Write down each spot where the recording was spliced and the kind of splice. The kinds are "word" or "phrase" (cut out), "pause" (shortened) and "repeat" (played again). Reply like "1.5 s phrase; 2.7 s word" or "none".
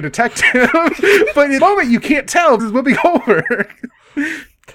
1.6 s word; 2.6 s word

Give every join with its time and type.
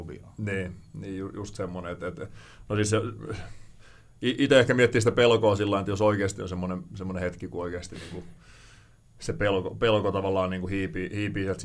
none

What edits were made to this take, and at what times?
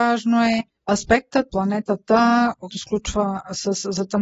1.5 s word; 2.7 s word

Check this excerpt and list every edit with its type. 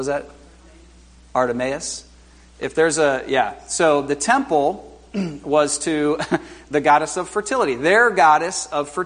none

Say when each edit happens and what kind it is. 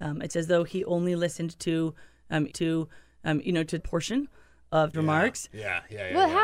2.5 s repeat; 3.8 s phrase; 4.9 s word

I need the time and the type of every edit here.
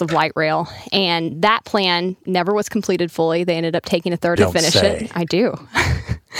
2.2 s word; 4.4 s phrase

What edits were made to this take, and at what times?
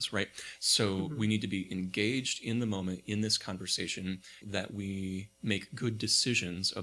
4.4 s word; 5.3 s pause

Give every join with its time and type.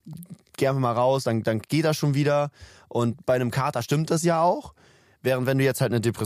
none

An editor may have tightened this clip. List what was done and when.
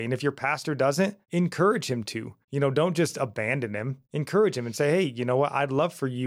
1.2 s pause; 2.4 s pause; 4.0 s pause

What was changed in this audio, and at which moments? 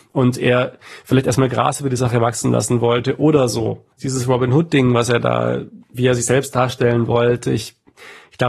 3.9 s pause

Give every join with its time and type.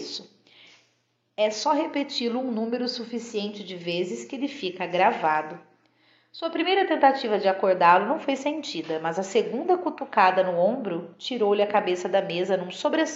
none

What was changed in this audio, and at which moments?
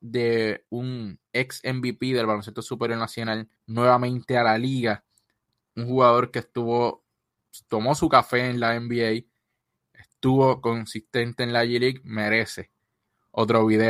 3.6 s pause

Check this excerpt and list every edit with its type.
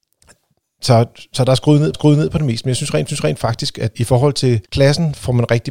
1.9 s repeat; 3.1 s repeat; 3.9 s word; 4.6 s pause

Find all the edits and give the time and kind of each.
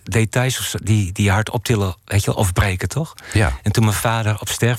2.0 s pause

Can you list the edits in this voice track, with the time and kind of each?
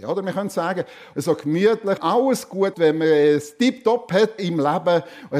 1.1 s word; 2.0 s word; 2.7 s word; 4.4 s word

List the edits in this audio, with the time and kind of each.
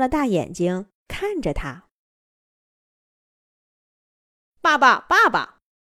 1.0 s pause

